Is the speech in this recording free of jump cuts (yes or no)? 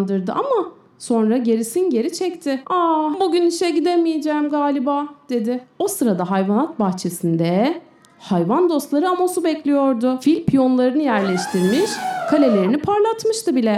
yes